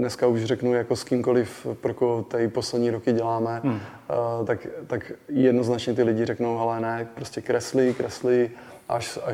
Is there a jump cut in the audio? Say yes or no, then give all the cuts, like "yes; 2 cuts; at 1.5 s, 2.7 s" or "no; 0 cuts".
no; 0 cuts